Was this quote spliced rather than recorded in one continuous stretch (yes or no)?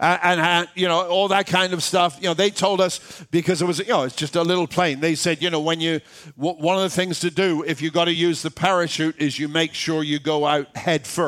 no